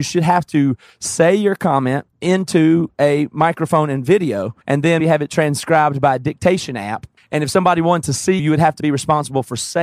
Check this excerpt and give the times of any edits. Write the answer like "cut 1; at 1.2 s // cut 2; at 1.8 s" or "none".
cut 1; at 2.1 s // cut 2; at 4.6 s // cut 3; at 5.0 s // cut 4; at 8.4 s // cut 5; at 8.8 s